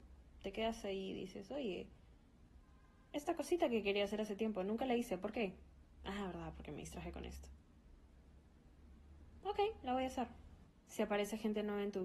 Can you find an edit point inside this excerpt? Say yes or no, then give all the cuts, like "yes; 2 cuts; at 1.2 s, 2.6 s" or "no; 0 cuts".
no; 0 cuts